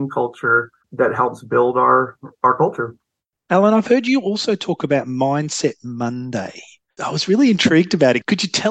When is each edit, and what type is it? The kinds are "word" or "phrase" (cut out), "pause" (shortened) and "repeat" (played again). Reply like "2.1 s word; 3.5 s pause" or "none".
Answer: none

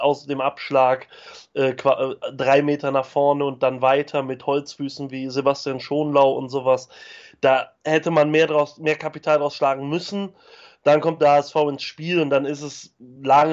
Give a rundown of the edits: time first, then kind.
7.8 s pause

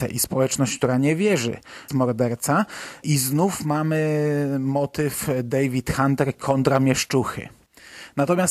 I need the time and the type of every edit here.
1.9 s phrase

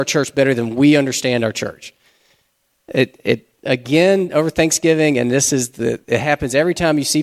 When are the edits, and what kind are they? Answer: none

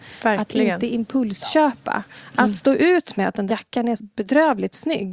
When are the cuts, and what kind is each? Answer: 3.5 s word; 4.0 s word

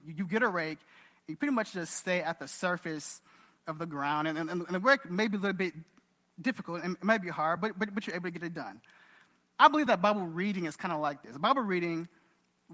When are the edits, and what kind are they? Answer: none

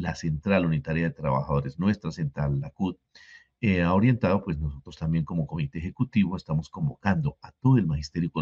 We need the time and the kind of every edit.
none

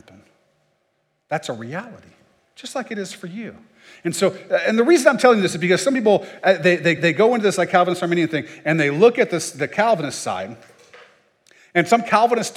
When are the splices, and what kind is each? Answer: 7.0 s repeat

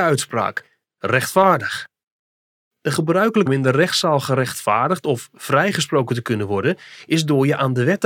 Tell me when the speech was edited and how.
3.5 s word

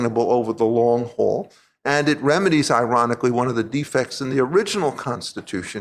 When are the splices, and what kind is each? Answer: none

